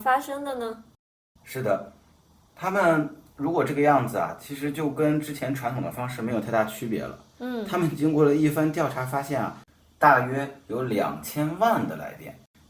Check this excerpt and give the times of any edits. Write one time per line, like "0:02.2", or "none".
none